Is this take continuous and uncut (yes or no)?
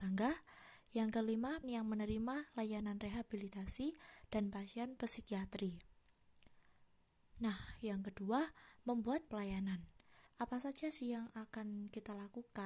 no